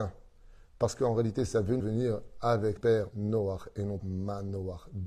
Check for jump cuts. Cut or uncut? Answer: cut